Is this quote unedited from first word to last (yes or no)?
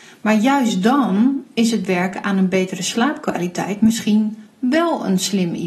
yes